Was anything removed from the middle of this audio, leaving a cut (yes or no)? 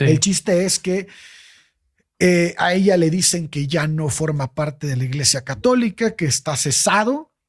no